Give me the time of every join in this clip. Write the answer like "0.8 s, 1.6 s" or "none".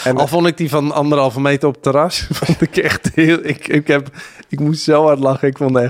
none